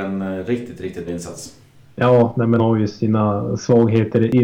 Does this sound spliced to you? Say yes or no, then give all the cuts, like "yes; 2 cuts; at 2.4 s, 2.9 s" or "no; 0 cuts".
yes; 2 cuts; at 1.1 s, 2.6 s